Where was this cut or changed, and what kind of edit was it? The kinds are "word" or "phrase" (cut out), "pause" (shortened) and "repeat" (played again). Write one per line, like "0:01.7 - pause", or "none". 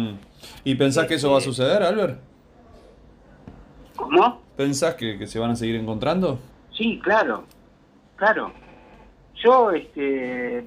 0:04.5 - pause
0:05.0 - phrase
0:06.5 - pause